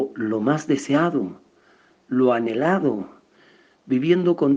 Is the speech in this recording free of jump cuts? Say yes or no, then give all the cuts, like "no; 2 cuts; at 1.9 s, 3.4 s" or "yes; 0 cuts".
yes; 0 cuts